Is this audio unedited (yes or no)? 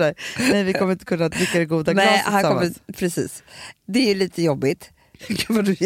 yes